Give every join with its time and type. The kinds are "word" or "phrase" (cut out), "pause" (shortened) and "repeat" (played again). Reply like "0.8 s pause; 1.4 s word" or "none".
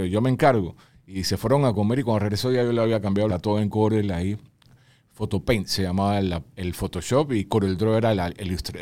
3.3 s phrase